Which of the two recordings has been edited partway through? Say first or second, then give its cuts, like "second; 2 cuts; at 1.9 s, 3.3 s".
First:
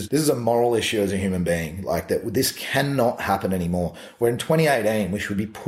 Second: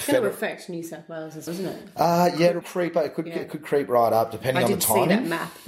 second; 2 cuts; at 1.5 s, 2.6 s